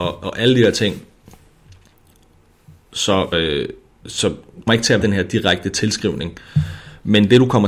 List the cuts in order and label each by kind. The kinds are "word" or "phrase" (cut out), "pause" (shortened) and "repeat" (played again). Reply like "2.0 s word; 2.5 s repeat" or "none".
3.3 s word; 4.7 s word; 5.0 s word